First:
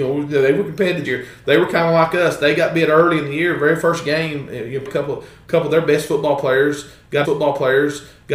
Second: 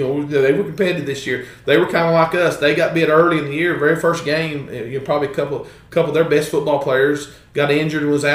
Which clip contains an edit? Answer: first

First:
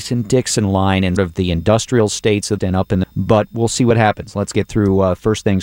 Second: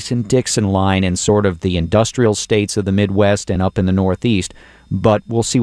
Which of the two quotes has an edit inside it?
first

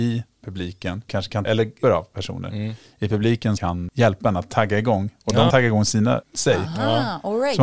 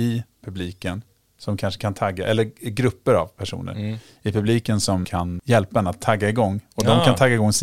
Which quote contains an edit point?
first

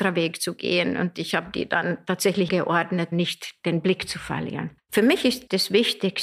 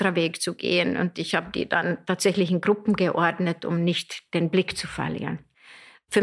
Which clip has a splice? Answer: first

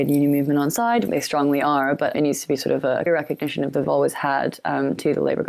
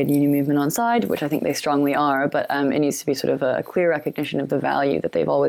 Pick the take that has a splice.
first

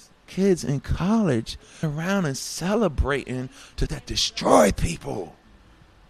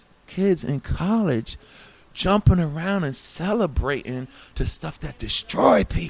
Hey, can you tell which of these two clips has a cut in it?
first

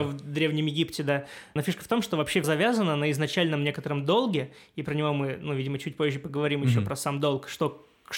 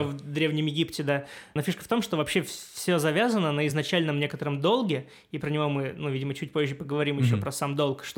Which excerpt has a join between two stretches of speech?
first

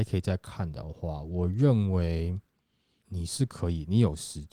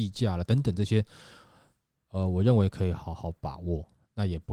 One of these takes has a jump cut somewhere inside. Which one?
first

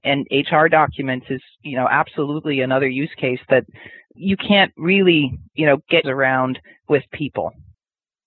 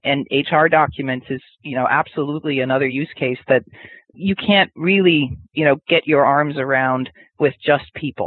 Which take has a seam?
first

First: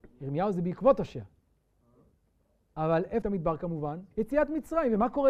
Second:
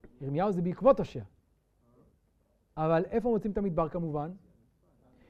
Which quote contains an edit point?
first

